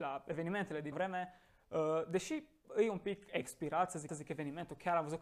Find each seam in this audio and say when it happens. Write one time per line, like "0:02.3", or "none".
0:00.9
0:04.1